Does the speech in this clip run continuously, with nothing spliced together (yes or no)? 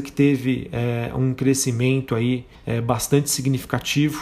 no